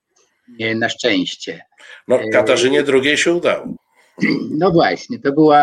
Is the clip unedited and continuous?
yes; 0 cuts

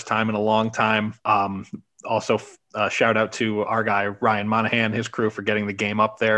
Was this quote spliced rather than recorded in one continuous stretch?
yes; 1 cut; at 1.2 s

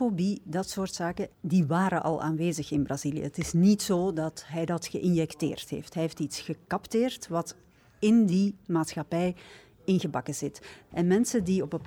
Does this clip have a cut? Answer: no; 0 cuts

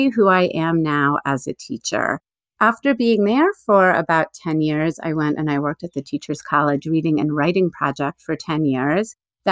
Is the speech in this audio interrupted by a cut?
no; 0 cuts

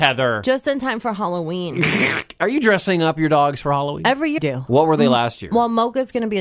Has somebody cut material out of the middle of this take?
yes; 1 cut; at 4.4 s

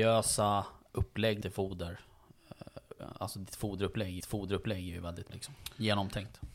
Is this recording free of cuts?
no; 3 cuts; at 1.4 s, 4.2 s, 5.3 s

